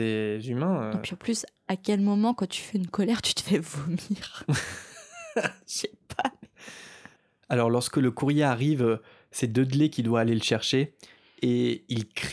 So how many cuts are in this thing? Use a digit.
0